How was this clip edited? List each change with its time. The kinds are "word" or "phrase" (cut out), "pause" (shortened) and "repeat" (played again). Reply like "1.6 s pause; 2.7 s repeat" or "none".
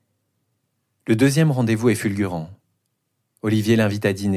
none